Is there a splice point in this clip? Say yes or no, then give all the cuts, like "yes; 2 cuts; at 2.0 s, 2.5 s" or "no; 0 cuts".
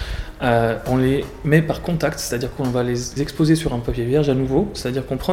yes; 1 cut; at 3.2 s